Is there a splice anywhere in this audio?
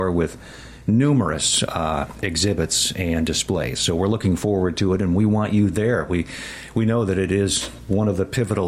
no; 0 cuts

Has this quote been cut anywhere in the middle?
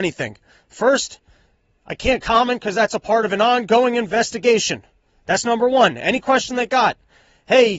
no; 0 cuts

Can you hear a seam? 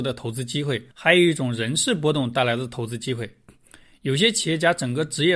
yes; 1 cut; at 0.9 s

